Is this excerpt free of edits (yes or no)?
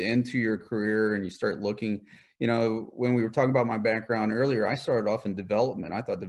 yes